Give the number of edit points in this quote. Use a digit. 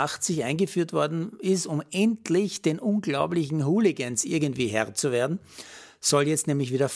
0